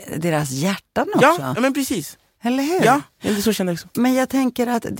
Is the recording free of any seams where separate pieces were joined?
yes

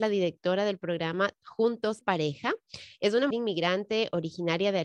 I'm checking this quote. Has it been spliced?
yes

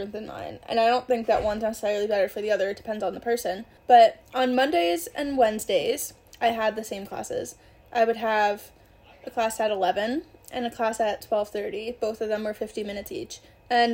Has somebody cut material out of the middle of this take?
no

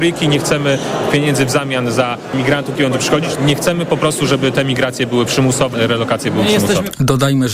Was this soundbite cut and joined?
yes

